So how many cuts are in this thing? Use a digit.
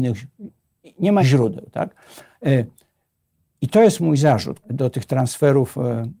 2